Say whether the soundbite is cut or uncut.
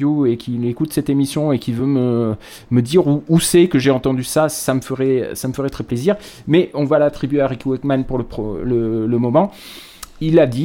uncut